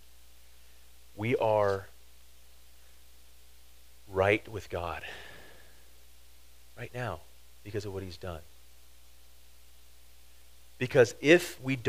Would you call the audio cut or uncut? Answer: uncut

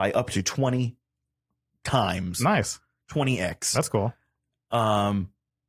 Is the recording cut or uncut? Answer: uncut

